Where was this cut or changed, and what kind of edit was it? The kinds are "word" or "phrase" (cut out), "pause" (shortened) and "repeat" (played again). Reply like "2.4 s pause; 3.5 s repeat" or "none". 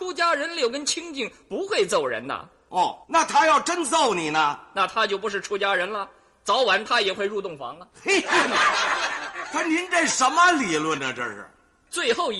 3.0 s pause